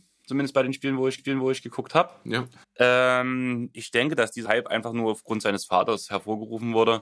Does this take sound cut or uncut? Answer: cut